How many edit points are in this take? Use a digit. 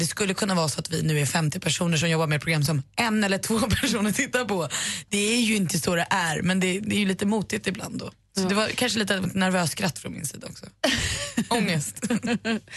0